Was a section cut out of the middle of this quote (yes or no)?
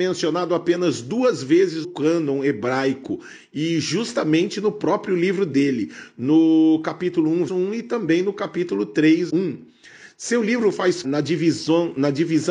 yes